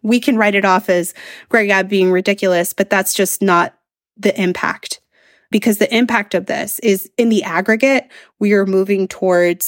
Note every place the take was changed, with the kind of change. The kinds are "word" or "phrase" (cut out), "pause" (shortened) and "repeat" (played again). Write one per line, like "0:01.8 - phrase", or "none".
none

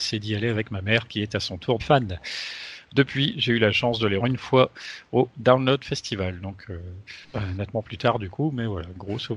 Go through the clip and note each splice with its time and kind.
0:01.8 - word
0:04.2 - word
0:07.2 - pause

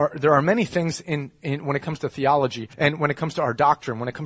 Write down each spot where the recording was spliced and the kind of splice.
0:02.7 - pause

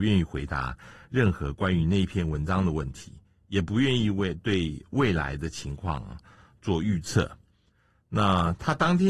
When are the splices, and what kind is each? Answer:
none

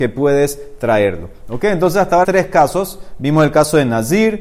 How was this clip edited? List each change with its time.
0:02.2 - word

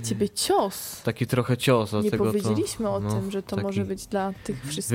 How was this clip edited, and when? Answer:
none

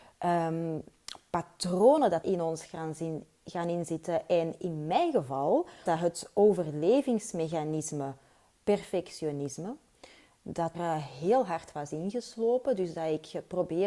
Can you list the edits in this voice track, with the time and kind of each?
0:02.2 - word
0:05.9 - word
0:10.7 - word

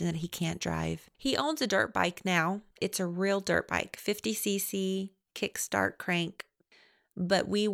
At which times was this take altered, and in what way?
0:01.1 - pause
0:02.7 - pause

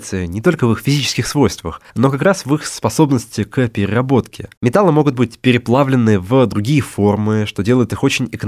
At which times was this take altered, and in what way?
0:01.9 - pause
0:04.6 - pause

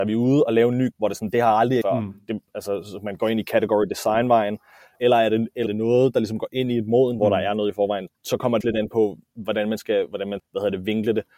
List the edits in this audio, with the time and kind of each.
0:00.9 - word
0:01.8 - word
0:05.0 - word
0:05.7 - word
0:07.2 - word
0:08.1 - word
0:08.6 - word
0:10.4 - word

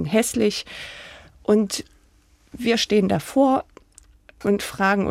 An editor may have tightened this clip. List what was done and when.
none

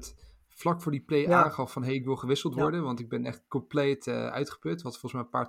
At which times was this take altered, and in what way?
none

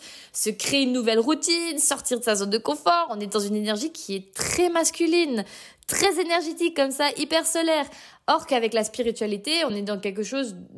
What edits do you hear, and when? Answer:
none

